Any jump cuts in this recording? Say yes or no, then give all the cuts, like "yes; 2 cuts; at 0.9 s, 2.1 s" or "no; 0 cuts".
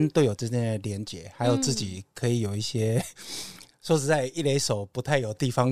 no; 0 cuts